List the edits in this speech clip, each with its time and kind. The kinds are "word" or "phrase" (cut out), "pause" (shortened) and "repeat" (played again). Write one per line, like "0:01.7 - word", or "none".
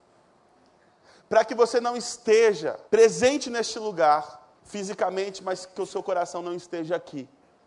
0:02.9 - pause
0:04.5 - pause